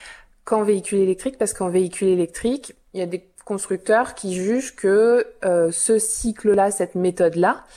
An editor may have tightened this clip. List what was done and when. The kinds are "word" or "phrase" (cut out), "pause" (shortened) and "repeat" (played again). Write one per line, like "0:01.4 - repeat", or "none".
none